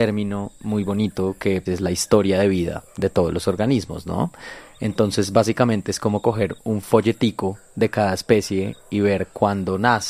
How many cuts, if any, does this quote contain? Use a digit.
0